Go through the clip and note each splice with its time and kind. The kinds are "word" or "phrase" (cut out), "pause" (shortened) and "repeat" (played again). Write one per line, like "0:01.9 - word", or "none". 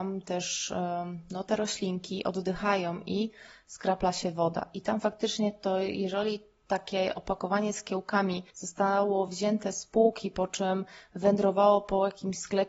none